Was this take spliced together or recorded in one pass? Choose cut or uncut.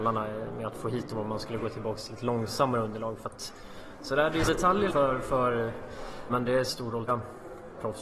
cut